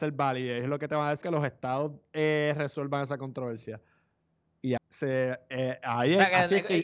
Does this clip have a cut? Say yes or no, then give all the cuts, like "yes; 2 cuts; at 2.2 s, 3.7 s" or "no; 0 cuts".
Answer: yes; 2 cuts; at 1.2 s, 4.8 s